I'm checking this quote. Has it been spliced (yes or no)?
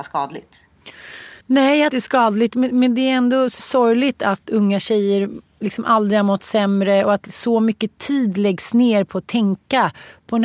yes